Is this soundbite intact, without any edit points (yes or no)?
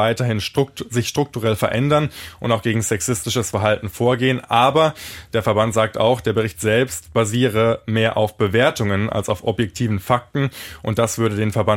yes